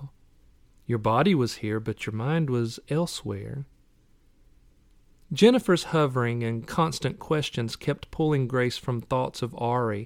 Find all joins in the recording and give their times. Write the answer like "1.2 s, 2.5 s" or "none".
none